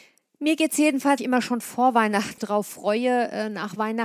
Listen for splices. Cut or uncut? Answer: cut